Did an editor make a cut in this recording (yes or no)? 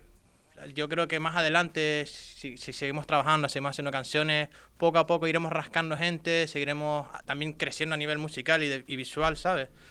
no